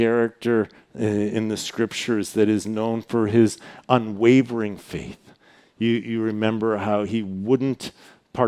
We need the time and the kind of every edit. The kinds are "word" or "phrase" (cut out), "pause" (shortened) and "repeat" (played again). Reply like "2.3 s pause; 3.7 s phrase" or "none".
none